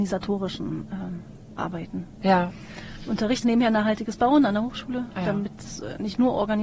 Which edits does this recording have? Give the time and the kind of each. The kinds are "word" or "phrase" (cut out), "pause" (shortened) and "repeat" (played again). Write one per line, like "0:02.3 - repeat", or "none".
0:03.4 - word